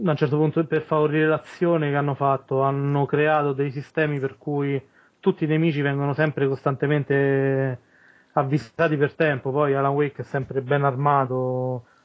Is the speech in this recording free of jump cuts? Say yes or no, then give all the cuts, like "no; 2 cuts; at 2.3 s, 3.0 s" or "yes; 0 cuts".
yes; 0 cuts